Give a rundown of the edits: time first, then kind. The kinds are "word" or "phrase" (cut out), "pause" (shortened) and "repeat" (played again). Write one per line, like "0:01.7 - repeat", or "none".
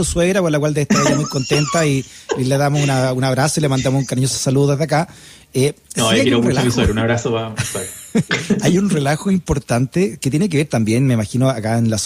none